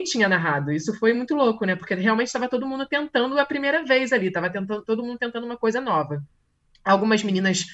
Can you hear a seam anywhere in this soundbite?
no; 0 cuts

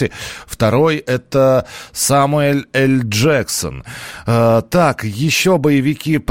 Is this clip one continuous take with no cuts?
yes; 0 cuts

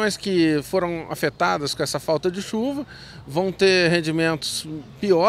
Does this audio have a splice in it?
no; 0 cuts

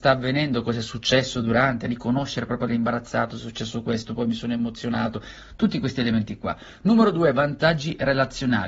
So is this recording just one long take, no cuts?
no; 1 cut; at 2.7 s

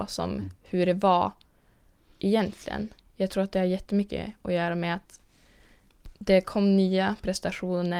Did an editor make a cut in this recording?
no; 0 cuts

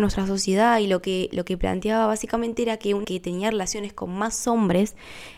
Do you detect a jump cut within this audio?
yes; 1 cut; at 3.0 s

